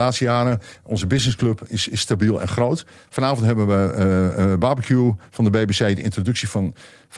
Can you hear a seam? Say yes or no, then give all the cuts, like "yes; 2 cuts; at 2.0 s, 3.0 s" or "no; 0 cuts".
no; 0 cuts